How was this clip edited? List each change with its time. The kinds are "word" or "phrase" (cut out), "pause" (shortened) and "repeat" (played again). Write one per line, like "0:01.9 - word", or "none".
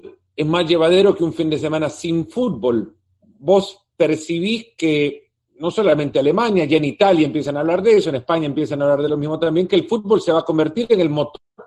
none